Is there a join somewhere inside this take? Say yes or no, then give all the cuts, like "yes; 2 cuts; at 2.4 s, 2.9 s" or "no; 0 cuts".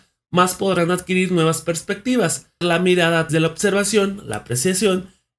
yes; 2 cuts; at 2.6 s, 3.3 s